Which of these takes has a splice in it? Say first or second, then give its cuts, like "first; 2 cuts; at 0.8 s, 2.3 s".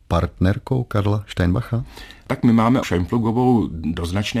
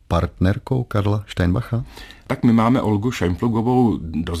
first; 1 cut; at 2.8 s